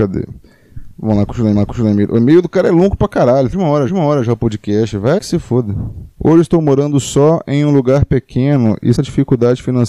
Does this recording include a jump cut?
yes; 6 cuts; at 1.6 s, 3.5 s, 3.9 s, 5.2 s, 6.1 s, 8.9 s

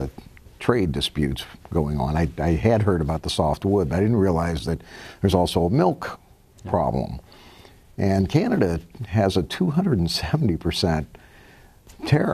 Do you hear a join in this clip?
no; 0 cuts

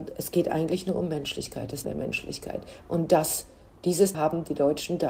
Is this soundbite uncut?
no; 2 cuts; at 1.8 s, 4.1 s

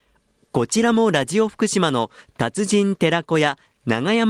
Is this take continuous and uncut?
yes; 0 cuts

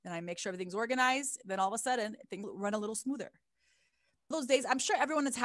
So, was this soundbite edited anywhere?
yes; 2 cuts; at 2.4 s, 4.3 s

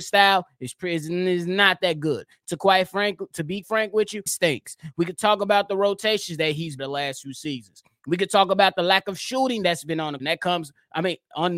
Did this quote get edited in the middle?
yes; 4 cuts; at 3.6 s, 4.3 s, 6.8 s, 10.2 s

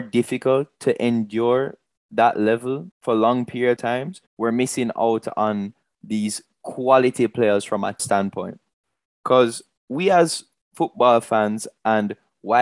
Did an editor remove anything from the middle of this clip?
yes; 4 cuts; at 2.9 s, 3.8 s, 4.3 s, 8.0 s

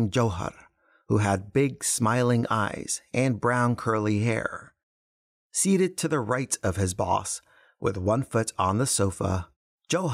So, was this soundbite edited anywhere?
no; 0 cuts

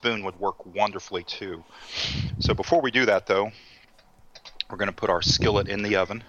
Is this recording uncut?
yes; 0 cuts

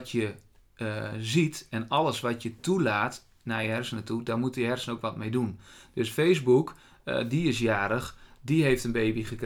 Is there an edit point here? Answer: no; 0 cuts

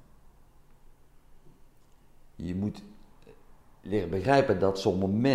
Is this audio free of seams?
yes; 0 cuts

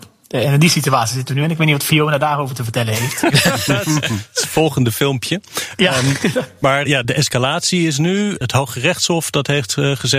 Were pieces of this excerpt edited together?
yes; 1 cut; at 6.9 s

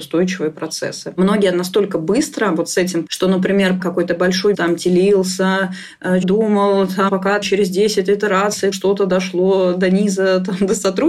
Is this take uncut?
no; 8 cuts; at 1.5 s, 3.1 s, 3.8 s, 4.5 s, 6.2 s, 7.1 s, 7.4 s, 8.7 s

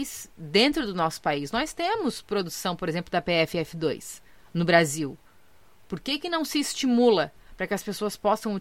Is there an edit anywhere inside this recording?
no; 0 cuts

